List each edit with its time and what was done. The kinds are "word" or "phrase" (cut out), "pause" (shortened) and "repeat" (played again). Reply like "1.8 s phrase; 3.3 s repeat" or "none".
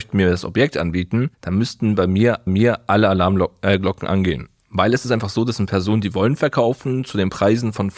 1.3 s pause; 2.5 s repeat